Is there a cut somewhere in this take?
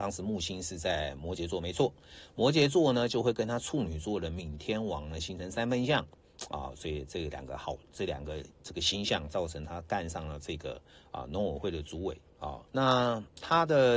yes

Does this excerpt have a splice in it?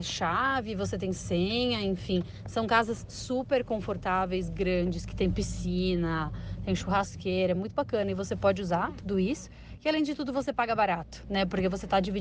no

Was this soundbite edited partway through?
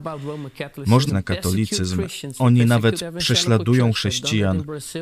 yes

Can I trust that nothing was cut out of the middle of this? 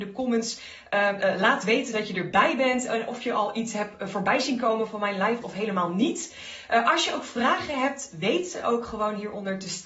no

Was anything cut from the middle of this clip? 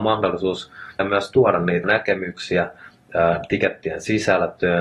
yes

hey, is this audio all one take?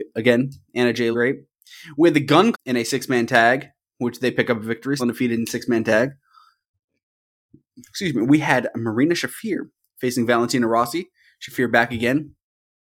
no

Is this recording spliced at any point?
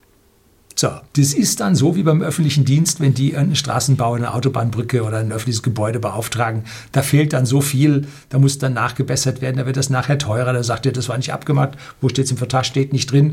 yes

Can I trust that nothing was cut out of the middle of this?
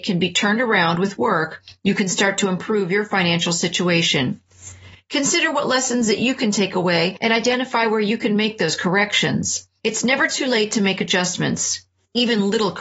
yes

